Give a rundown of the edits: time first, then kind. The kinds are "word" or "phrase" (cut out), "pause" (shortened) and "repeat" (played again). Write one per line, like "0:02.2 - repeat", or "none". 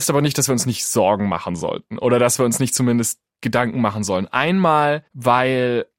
0:05.1 - pause

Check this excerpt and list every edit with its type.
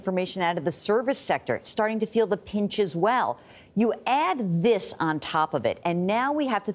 none

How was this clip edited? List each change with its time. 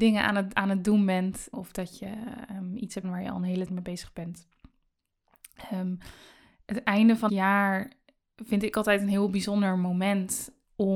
0:01.5 - word
0:03.0 - word
0:03.7 - word
0:07.3 - word

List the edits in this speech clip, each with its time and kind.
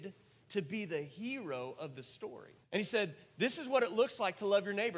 0:02.6 - pause

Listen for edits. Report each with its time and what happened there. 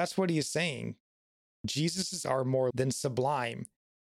0:02.2 - word
0:02.7 - word

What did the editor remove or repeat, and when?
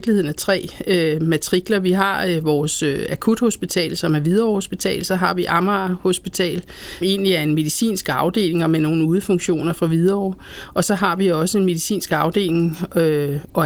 0:07.0 - word

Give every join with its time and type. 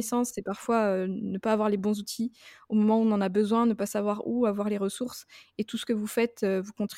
none

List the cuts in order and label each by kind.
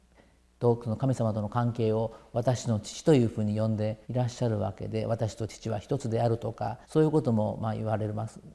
0:04.0 - pause
0:06.8 - pause

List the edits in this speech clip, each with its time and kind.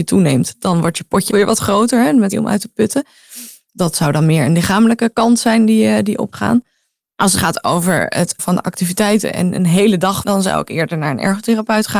0:01.3 - word
0:02.3 - word
0:06.3 - word
0:07.4 - word
0:08.4 - word
0:10.2 - word

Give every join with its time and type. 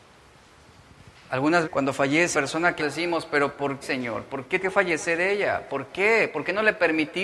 0:01.6 - word
0:02.3 - word
0:02.8 - word
0:03.8 - word
0:04.6 - word

